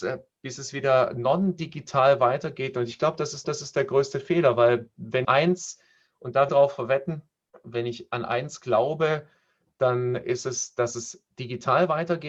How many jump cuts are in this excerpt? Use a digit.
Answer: 4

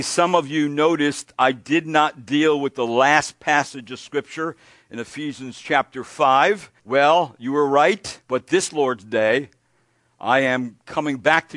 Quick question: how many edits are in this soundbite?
2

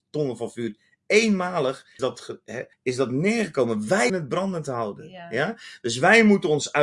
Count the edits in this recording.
3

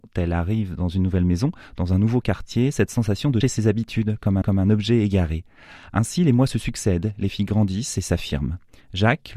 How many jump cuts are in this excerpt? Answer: 2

